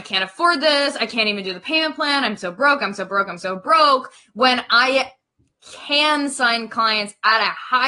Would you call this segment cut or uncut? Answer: uncut